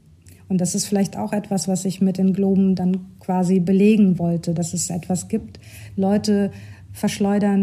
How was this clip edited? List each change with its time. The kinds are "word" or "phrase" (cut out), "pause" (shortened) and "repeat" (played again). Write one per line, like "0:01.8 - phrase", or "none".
none